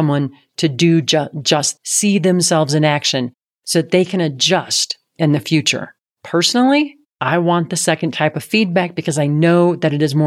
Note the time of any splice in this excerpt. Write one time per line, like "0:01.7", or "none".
0:01.8

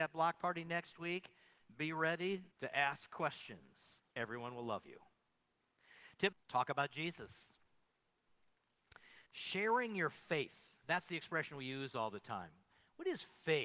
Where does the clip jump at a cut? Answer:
0:02.5
0:06.3
0:09.3

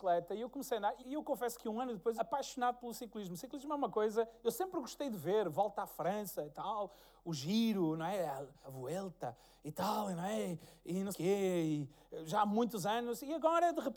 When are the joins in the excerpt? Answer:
0:01.0
0:02.2
0:08.6
0:11.1

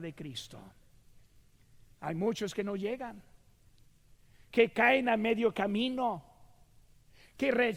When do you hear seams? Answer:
none

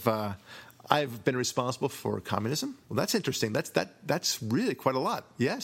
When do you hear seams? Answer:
0:02.8

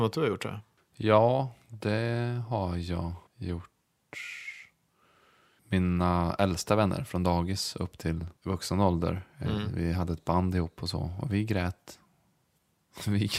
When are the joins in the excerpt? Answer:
0:03.3
0:08.4

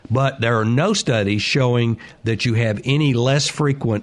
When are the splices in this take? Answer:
none

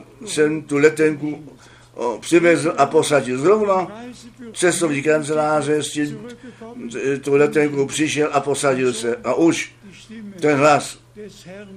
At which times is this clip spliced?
0:04.5

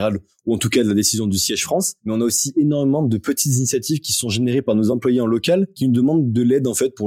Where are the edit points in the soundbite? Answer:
none

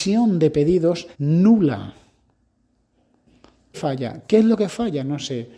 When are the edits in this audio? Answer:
0:01.1
0:03.7

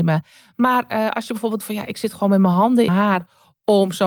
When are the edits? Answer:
0:01.6
0:02.9

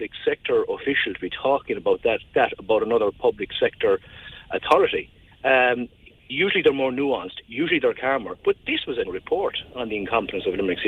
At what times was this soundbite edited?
0:02.3
0:05.3
0:08.4
0:09.0

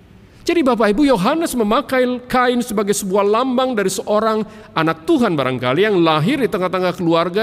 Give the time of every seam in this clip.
none

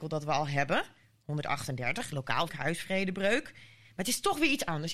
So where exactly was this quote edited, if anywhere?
0:02.5

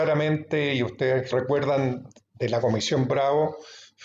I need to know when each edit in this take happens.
0:01.3

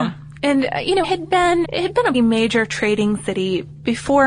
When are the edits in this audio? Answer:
0:01.0
0:01.6
0:02.1

